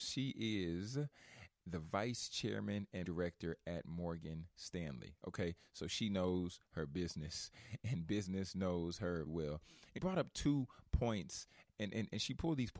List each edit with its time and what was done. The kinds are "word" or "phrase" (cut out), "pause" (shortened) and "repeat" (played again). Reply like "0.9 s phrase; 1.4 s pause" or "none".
3.0 s word; 9.3 s word; 10.0 s word; 11.7 s word